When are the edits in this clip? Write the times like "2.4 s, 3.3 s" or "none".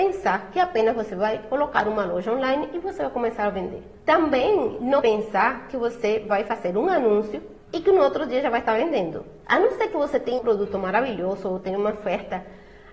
4.0 s, 5.0 s, 7.6 s, 9.4 s, 10.4 s

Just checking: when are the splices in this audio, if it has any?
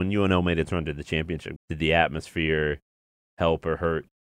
1.6 s

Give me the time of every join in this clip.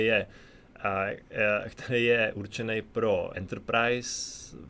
3.3 s

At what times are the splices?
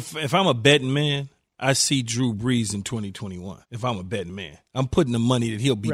3.6 s, 4.6 s

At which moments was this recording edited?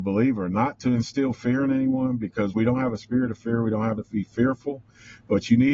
4.0 s

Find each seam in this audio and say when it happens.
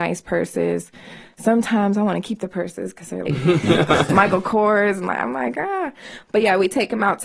3.3 s

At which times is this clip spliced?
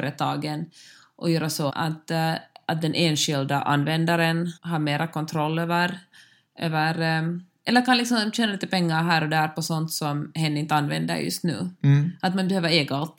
1.7 s, 4.6 s

